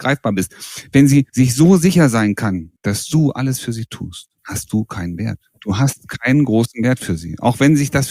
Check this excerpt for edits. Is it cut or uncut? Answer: cut